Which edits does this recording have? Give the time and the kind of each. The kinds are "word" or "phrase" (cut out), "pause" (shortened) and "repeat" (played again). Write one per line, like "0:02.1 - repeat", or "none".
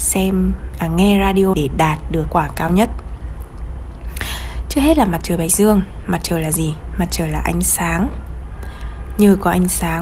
0:01.5 - word
0:02.3 - word